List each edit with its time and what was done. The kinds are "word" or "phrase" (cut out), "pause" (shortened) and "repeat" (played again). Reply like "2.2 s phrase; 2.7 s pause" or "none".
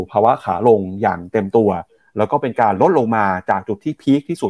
none